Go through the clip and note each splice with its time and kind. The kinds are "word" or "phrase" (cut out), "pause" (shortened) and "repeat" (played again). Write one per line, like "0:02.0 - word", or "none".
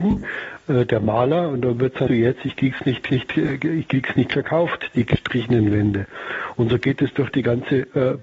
0:02.1 - phrase
0:03.1 - repeat